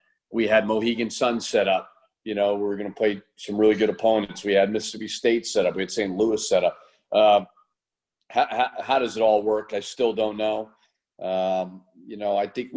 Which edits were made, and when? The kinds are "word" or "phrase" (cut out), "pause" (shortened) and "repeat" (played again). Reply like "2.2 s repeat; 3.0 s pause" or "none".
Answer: none